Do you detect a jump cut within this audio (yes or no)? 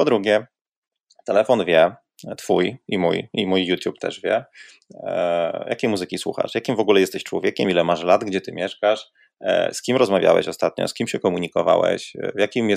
no